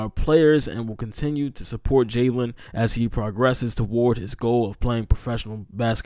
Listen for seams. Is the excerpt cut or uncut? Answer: cut